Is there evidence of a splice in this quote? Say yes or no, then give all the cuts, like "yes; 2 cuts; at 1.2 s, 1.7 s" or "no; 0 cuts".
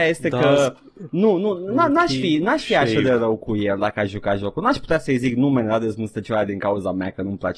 no; 0 cuts